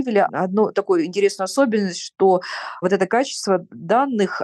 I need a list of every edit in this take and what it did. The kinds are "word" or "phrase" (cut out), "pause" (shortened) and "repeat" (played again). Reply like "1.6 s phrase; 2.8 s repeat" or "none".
none